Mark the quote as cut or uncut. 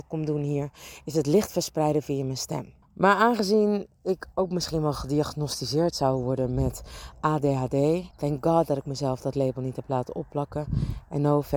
cut